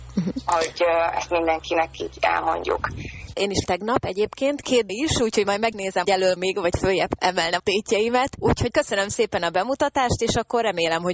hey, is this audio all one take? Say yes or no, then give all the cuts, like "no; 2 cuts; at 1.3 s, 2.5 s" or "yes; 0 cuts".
no; 8 cuts; at 3.6 s, 4.9 s, 5.7 s, 6.0 s, 6.4 s, 7.2 s, 7.6 s, 8.7 s